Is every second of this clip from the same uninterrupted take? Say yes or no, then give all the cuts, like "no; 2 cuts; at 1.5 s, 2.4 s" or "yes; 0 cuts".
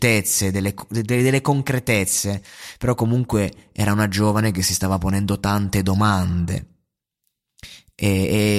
yes; 0 cuts